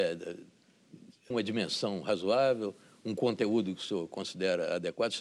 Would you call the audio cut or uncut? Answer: cut